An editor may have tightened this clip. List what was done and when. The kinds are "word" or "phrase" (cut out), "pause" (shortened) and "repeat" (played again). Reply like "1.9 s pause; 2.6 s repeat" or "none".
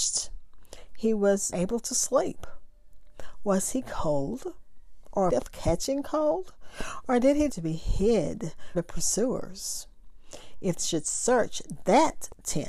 1.5 s word; 5.3 s word; 7.5 s word; 8.7 s word; 10.8 s word